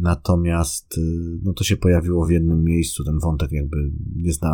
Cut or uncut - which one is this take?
uncut